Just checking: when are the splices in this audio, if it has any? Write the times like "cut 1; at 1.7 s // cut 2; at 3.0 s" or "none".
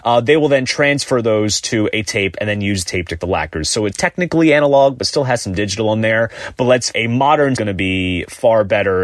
cut 1; at 2.9 s // cut 2; at 3.2 s // cut 3; at 3.9 s // cut 4; at 6.9 s // cut 5; at 7.6 s